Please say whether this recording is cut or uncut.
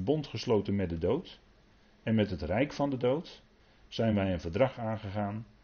uncut